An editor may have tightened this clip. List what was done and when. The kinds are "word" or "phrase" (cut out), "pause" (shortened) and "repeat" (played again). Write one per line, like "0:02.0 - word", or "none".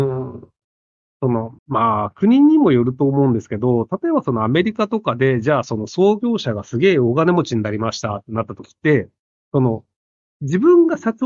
0:01.6 - pause

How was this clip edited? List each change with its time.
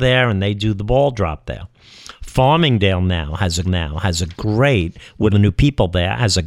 0:03.6 - repeat
0:05.3 - word

